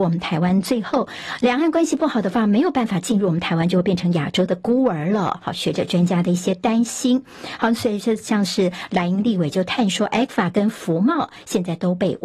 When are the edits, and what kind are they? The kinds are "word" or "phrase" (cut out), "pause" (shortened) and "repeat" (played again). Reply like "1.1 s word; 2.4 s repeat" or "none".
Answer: none